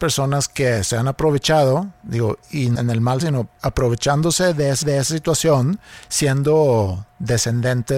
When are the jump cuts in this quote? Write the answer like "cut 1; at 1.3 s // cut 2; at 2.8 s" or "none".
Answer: cut 1; at 2.8 s // cut 2; at 3.2 s // cut 3; at 4.8 s